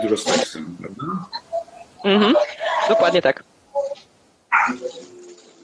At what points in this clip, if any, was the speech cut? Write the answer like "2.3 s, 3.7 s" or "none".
none